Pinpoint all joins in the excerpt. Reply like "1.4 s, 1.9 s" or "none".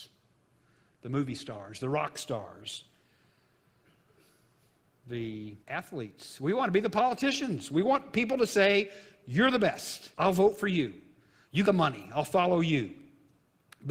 5.6 s, 10.1 s, 11.7 s